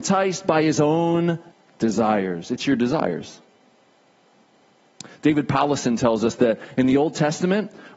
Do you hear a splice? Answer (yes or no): yes